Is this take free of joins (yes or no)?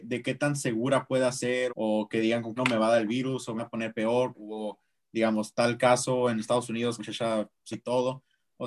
no